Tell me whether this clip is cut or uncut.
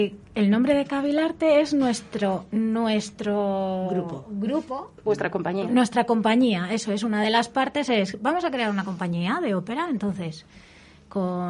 cut